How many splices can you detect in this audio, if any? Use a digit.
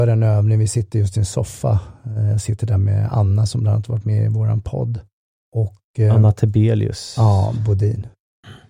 1